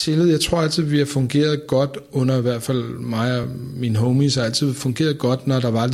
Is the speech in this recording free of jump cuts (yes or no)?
yes